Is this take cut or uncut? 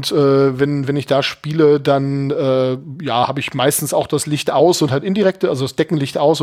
uncut